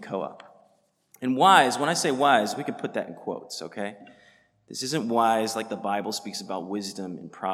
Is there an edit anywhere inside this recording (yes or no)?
no